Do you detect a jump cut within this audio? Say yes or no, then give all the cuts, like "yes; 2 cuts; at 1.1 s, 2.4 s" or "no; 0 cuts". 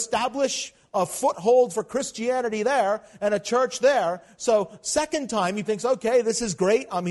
yes; 1 cut; at 5.6 s